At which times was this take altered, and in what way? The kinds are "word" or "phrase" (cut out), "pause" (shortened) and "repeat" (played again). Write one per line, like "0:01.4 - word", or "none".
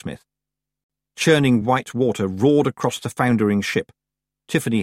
none